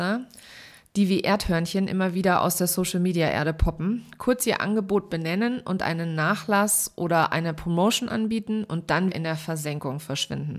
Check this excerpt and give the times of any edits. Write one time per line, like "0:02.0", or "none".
0:09.1